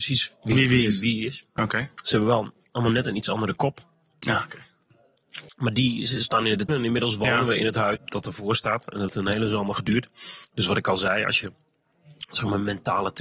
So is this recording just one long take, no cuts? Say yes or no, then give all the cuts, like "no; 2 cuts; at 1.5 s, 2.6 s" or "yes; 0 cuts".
no; 3 cuts; at 6.7 s, 8.0 s, 9.1 s